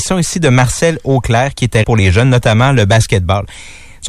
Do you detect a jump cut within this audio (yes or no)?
yes